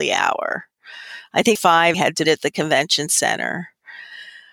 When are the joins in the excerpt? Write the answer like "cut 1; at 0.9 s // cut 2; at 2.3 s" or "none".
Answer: cut 1; at 1.6 s // cut 2; at 1.9 s // cut 3; at 2.2 s